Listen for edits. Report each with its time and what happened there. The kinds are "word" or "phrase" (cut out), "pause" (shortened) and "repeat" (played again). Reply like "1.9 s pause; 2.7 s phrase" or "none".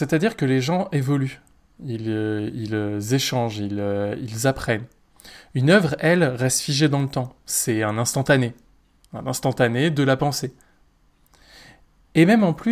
none